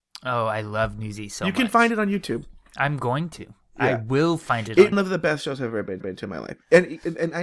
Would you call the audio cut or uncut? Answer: cut